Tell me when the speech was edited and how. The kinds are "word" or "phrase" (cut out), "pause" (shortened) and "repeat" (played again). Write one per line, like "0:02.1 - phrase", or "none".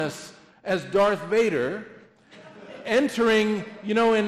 none

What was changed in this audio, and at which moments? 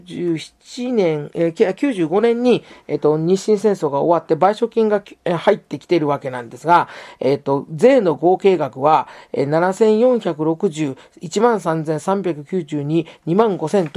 none

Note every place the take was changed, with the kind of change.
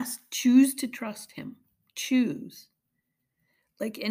none

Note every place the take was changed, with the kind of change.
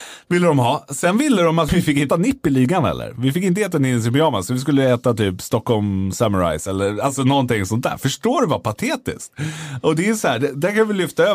0:01.7 - word
0:02.1 - word

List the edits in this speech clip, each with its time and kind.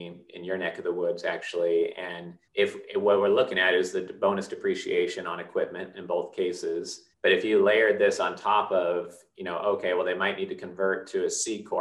0:02.5 - pause
0:07.1 - pause

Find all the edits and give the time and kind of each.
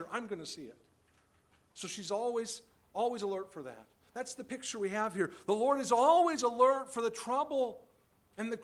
none

